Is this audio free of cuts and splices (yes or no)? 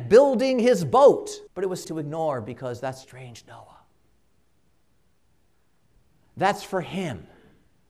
no